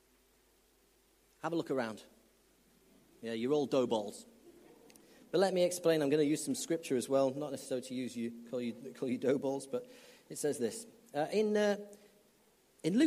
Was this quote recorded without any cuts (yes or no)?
yes